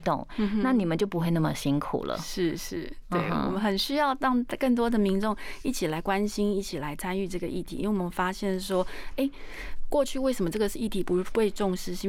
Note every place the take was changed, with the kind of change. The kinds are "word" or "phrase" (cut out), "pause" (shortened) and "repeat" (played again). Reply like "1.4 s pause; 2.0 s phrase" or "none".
none